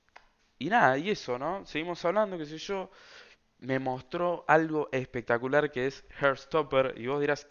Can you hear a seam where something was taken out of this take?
no; 0 cuts

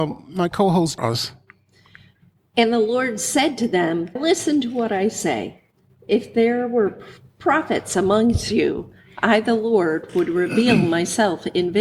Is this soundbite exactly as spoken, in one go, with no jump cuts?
no; 2 cuts; at 1.0 s, 4.2 s

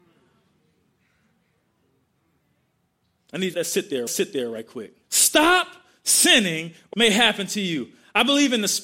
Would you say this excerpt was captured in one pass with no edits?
no; 4 cuts; at 3.5 s, 4.1 s, 5.0 s, 6.9 s

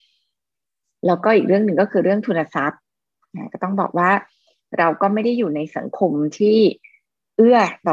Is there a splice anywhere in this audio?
no; 0 cuts

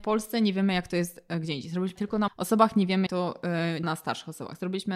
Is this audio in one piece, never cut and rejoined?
no; 4 cuts; at 2.0 s, 2.3 s, 3.1 s, 3.8 s

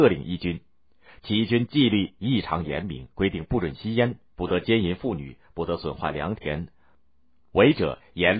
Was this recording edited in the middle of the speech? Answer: no; 0 cuts

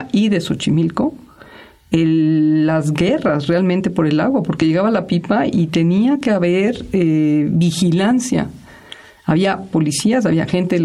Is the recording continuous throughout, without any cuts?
yes; 0 cuts

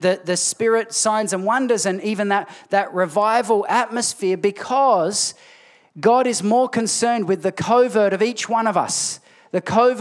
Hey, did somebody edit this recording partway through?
no; 0 cuts

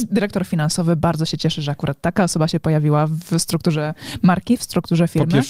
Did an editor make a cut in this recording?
no; 0 cuts

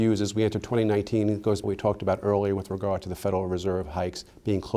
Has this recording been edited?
yes; 1 cut; at 1.6 s

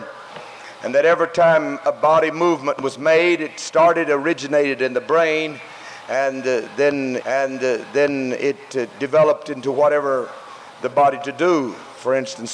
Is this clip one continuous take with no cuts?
no; 2 cuts; at 7.2 s, 10.9 s

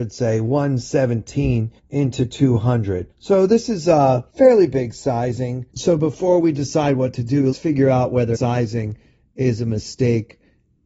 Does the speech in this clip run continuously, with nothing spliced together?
no; 6 cuts; at 1.8 s, 3.1 s, 4.3 s, 5.7 s, 7.5 s, 8.3 s

